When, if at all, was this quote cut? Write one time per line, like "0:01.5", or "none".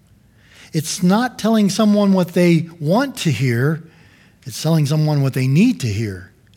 none